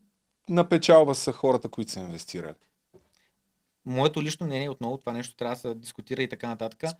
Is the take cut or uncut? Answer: uncut